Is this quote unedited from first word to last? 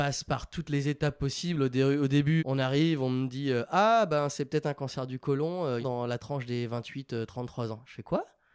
no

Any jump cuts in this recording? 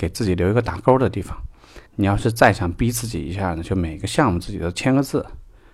yes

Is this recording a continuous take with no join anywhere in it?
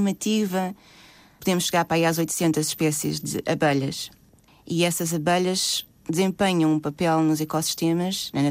yes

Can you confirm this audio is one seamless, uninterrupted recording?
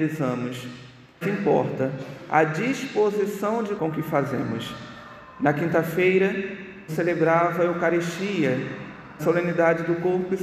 no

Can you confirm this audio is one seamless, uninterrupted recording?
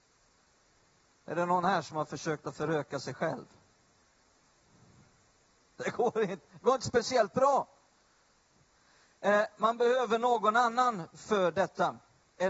yes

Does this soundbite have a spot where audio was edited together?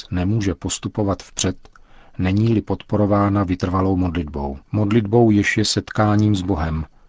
yes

